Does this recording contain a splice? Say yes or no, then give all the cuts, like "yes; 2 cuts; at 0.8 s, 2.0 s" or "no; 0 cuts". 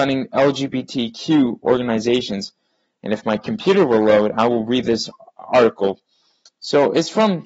no; 0 cuts